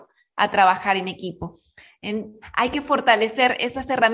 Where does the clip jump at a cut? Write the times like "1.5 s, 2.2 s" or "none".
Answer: none